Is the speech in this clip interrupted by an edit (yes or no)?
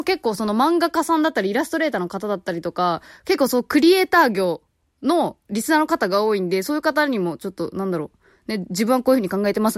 no